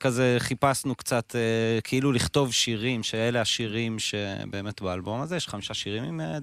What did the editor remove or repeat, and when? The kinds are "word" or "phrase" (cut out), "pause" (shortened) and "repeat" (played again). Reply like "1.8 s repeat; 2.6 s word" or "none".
none